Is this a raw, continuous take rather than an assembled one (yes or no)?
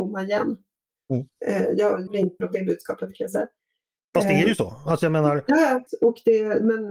no